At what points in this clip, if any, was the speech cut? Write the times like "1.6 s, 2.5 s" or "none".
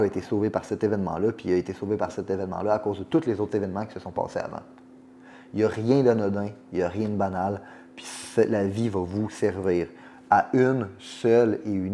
none